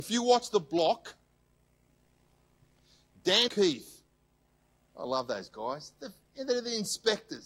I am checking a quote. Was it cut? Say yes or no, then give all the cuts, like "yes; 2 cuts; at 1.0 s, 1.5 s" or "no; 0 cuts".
yes; 1 cut; at 3.5 s